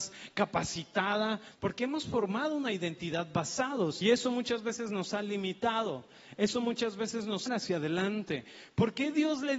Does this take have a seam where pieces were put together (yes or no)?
yes